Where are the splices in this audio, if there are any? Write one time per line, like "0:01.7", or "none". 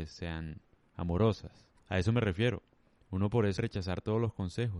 0:01.8
0:03.6